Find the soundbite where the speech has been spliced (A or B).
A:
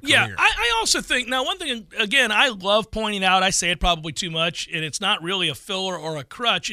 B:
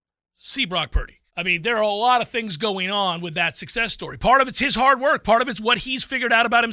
B